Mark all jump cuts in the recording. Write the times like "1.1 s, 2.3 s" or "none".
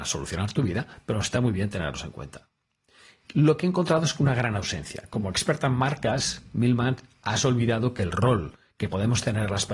none